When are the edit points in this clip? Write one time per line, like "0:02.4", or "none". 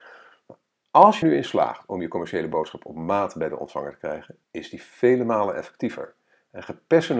0:01.2
0:04.4